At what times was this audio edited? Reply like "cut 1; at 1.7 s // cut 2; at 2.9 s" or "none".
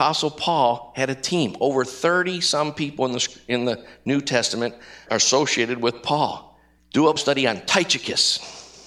cut 1; at 5.1 s // cut 2; at 6.8 s // cut 3; at 7.2 s

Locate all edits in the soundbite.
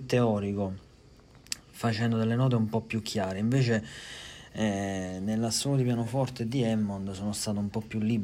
none

